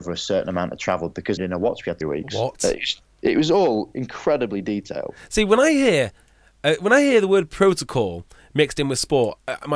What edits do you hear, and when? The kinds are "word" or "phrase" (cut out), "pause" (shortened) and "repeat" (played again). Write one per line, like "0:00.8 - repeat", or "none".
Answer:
0:01.4 - phrase
0:02.0 - phrase